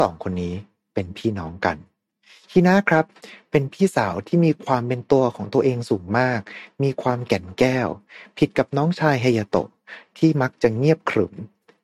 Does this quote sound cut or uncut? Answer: uncut